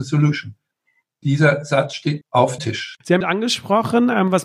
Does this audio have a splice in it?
yes; 3 cuts; at 2.2 s, 2.6 s, 3.2 s

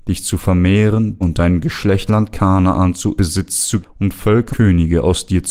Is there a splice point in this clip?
yes; 5 cuts; at 1.2 s, 2.1 s, 3.2 s, 3.8 s, 4.5 s

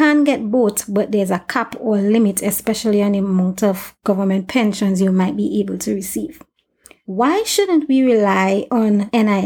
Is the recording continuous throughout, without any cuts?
yes; 0 cuts

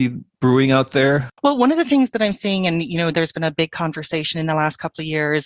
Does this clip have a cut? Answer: no; 0 cuts

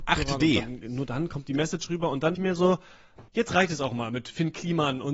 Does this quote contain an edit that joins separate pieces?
yes; 2 cuts; at 2.4 s, 3.3 s

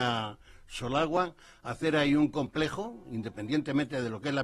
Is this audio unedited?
yes; 0 cuts

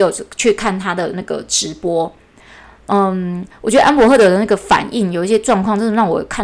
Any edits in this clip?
no; 0 cuts

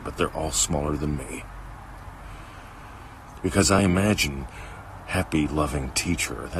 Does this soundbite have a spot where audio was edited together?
no; 0 cuts

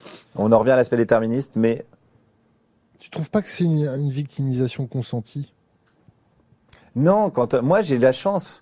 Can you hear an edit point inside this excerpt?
no; 0 cuts

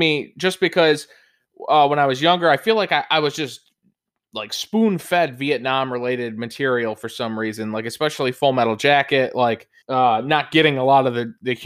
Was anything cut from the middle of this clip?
yes; 1 cut; at 9.8 s

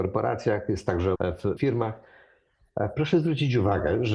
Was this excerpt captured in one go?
no; 2 cuts; at 1.2 s, 1.6 s

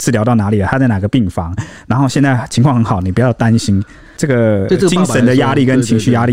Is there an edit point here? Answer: no; 0 cuts

